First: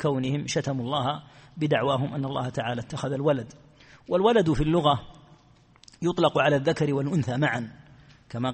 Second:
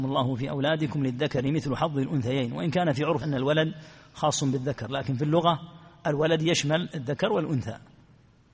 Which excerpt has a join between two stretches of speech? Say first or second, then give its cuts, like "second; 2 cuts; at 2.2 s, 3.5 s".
second; 1 cut; at 3.2 s